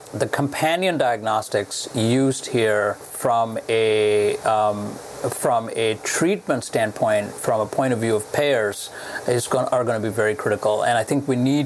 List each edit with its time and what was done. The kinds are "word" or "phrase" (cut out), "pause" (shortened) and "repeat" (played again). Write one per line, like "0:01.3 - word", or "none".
none